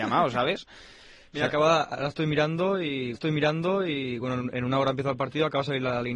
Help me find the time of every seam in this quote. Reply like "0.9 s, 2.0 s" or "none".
3.1 s